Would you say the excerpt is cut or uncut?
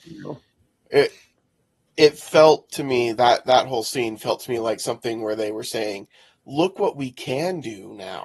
uncut